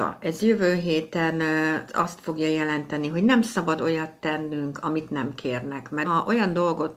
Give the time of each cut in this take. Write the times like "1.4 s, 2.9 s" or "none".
1.9 s, 6.0 s